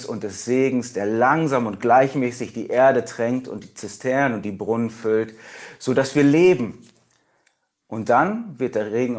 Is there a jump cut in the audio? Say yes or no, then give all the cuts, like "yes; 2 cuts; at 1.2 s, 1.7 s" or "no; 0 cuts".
no; 0 cuts